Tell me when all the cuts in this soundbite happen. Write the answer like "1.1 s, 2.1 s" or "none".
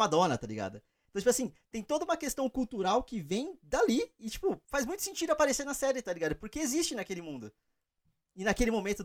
4.6 s